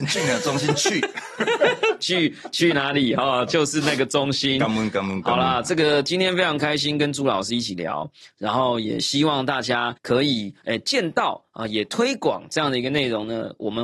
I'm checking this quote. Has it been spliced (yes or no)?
yes